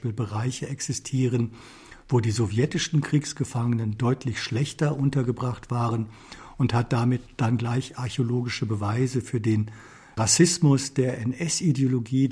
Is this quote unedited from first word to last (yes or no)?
yes